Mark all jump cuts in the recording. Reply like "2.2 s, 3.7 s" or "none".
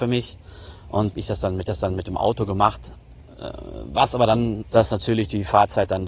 1.1 s, 1.7 s, 4.6 s